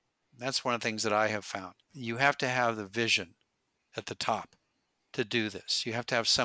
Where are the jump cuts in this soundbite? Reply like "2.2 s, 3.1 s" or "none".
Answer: 1.8 s